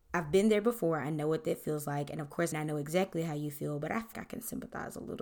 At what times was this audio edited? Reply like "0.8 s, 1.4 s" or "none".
2.5 s, 4.1 s

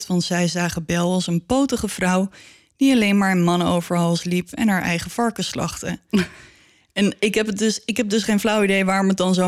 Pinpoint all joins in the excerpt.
none

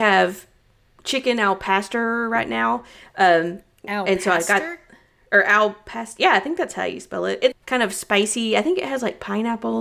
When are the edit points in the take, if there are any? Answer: 7.5 s

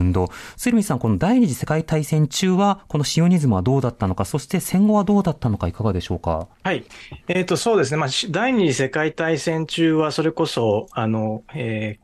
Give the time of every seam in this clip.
6.5 s

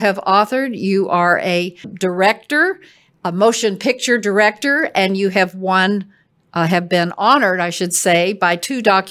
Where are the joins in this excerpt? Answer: 1.8 s

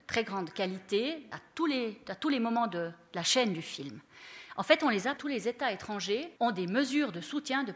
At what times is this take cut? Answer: 1.3 s, 5.2 s, 6.4 s

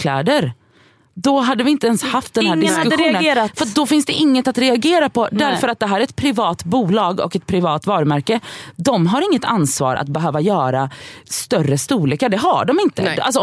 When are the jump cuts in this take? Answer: none

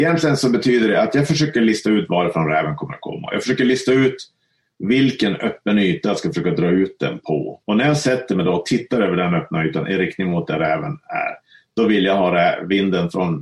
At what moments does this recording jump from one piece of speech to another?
7.6 s

